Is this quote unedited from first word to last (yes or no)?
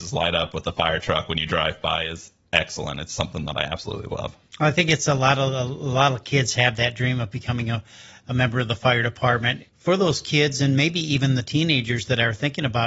no